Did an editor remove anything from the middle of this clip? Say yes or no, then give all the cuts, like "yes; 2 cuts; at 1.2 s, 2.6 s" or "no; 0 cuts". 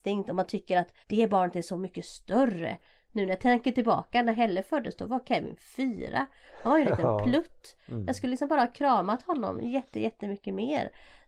yes; 1 cut; at 1.0 s